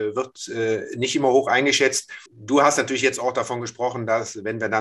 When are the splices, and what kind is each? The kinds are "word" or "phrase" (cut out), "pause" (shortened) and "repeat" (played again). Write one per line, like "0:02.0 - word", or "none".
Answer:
0:02.3 - pause